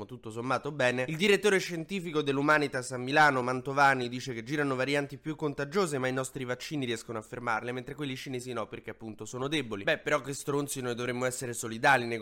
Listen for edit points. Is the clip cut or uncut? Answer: uncut